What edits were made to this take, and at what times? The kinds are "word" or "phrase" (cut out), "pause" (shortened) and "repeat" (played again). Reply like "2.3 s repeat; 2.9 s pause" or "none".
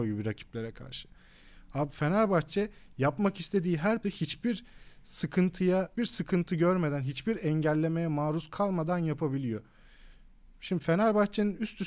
4.0 s word; 6.0 s word

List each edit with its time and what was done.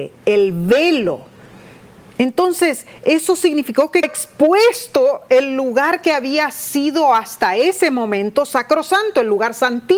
4.0 s word

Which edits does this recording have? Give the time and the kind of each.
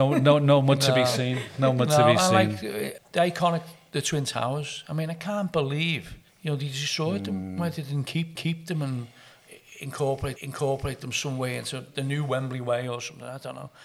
3.0 s word; 6.3 s pause; 8.4 s repeat; 10.4 s repeat

